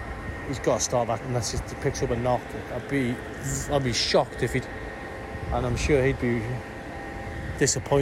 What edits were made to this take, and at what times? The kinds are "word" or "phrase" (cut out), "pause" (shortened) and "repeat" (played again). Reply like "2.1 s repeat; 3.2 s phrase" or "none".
1.2 s word; 4.6 s word